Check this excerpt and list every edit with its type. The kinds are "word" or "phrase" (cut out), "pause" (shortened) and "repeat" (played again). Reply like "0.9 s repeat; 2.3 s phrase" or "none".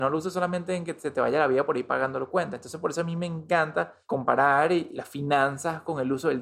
4.0 s pause